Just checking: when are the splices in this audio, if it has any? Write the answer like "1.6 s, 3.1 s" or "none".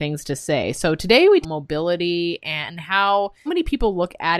1.4 s, 3.5 s